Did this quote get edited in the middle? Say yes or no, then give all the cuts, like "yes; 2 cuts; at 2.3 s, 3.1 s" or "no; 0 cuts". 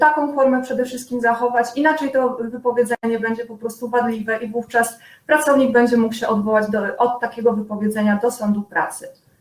no; 0 cuts